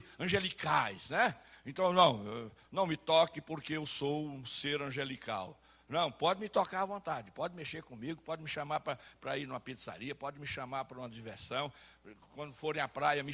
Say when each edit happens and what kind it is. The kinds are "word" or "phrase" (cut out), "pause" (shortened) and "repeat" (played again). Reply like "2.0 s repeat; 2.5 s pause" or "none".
none